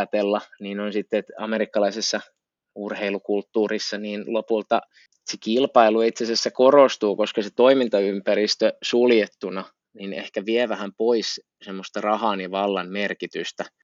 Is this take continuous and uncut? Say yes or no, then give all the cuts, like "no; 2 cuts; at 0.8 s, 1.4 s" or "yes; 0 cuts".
yes; 0 cuts